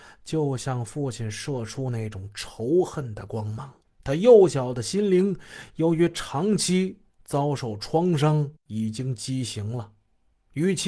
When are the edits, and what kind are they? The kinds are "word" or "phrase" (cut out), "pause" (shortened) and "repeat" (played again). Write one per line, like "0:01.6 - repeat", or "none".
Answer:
0:03.9 - pause

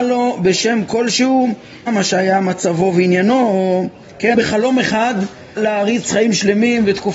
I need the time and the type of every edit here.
0:01.9 - word
0:04.3 - word
0:05.6 - word

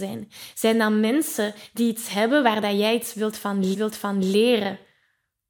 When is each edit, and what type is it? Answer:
0:03.7 - repeat

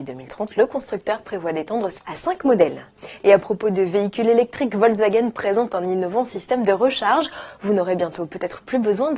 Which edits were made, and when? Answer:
0:02.0 - word

